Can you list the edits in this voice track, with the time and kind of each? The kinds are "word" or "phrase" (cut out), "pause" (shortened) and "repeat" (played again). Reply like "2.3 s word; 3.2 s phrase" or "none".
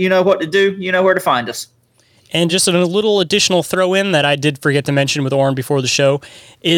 none